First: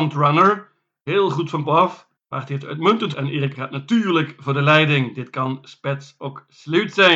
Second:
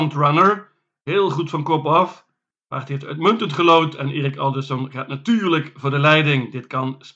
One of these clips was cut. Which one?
first; 4 cuts; at 1.6 s, 2.2 s, 3.1 s, 3.5 s

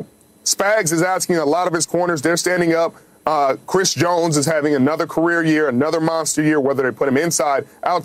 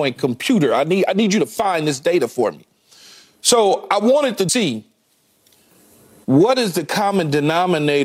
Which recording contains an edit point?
second; 1 cut; at 4.5 s

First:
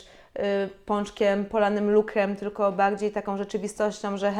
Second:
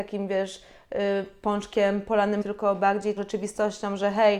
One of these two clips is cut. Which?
second; 2 cuts; at 2.4 s, 3.2 s

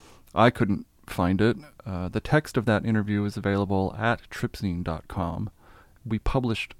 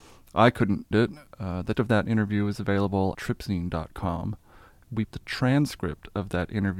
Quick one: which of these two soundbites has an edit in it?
second; 4 cuts; at 0.9 s, 1.7 s, 3.1 s, 5.1 s

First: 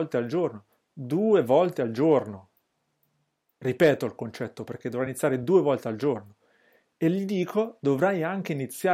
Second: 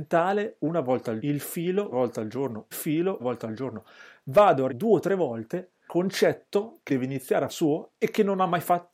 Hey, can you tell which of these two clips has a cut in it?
second; 8 cuts; at 1.2 s, 1.9 s, 2.7 s, 3.2 s, 4.7 s, 5.9 s, 6.9 s, 7.5 s

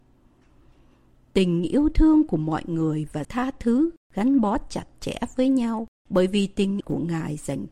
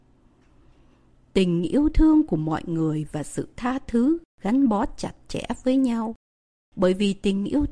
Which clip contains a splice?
first; 3 cuts; at 3.2 s, 6.0 s, 6.8 s

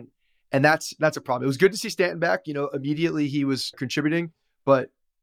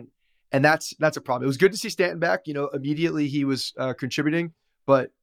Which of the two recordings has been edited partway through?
first; 1 cut; at 3.7 s

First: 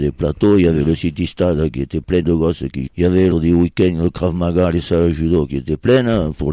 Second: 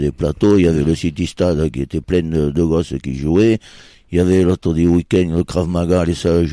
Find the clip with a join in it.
first; 3 cuts; at 2.2 s, 2.9 s, 3.3 s

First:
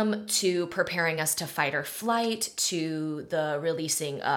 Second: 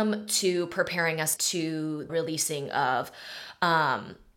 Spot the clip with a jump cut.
second; 2 cuts; at 1.4 s, 2.1 s

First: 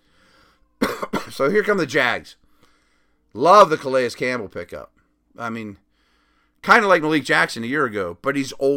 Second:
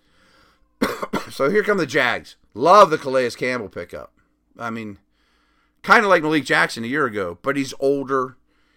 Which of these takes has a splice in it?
second; 1 cut; at 2.5 s

